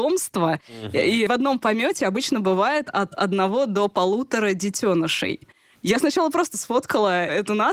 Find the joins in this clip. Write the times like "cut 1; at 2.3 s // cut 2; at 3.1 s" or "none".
cut 1; at 1.3 s

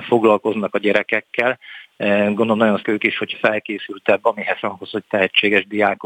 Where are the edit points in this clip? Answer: cut 1; at 2.8 s // cut 2; at 3.3 s // cut 3; at 4.6 s

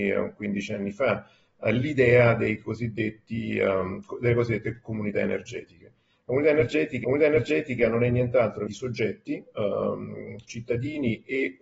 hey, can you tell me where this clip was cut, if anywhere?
cut 1; at 7.0 s // cut 2; at 8.7 s

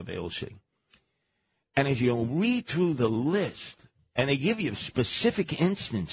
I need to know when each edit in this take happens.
none

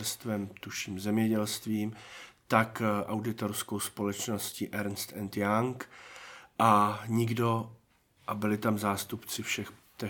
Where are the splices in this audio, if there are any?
none

